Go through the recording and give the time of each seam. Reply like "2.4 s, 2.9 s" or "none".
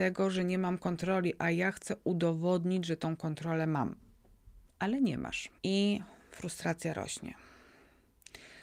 4.7 s, 5.6 s